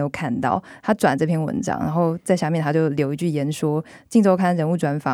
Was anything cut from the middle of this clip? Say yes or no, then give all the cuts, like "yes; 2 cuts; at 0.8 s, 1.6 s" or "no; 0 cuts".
no; 0 cuts